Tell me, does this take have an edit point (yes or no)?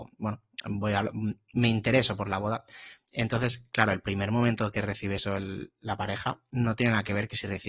no